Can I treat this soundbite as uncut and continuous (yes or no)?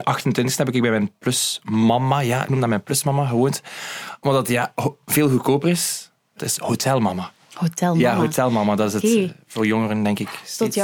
no